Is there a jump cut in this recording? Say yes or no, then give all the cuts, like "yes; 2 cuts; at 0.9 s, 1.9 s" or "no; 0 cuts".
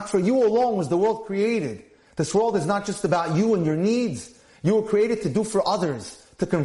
no; 0 cuts